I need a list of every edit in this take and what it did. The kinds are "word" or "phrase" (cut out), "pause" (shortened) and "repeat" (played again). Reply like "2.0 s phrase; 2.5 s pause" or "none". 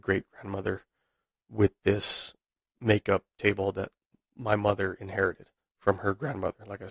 none